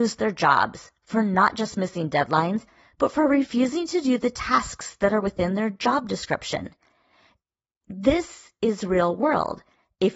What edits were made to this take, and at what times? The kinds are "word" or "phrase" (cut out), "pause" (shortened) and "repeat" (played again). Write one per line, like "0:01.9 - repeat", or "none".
none